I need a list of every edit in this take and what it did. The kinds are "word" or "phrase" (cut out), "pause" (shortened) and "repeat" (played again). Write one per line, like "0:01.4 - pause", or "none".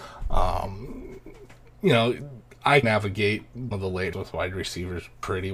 0:02.8 - word
0:03.7 - word
0:04.1 - word